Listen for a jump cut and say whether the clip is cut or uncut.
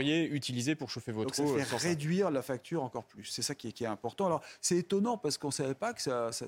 uncut